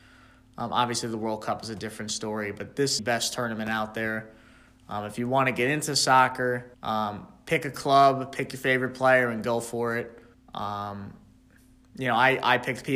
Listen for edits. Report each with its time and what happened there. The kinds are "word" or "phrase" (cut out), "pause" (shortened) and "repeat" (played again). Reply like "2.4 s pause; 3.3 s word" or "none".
3.0 s phrase; 6.7 s pause; 10.3 s pause